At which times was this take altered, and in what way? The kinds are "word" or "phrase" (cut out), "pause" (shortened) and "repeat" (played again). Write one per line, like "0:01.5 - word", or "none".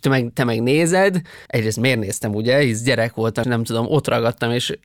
0:01.5 - pause
0:03.4 - word